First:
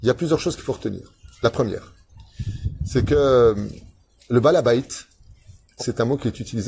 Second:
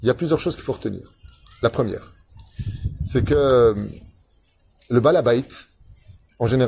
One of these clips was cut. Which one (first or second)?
first